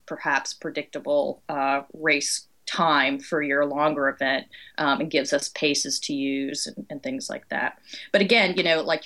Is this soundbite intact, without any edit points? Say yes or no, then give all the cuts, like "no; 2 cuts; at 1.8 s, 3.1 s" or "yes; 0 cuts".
no; 1 cut; at 2.5 s